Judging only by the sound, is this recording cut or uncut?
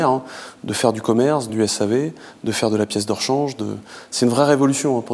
cut